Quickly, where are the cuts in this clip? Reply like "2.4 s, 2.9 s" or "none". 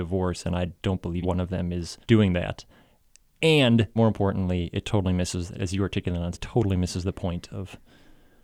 1.2 s, 2.0 s, 4.0 s, 5.5 s, 6.3 s